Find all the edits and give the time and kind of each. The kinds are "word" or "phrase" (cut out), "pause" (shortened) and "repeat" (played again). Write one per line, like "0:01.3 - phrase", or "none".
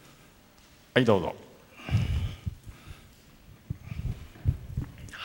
none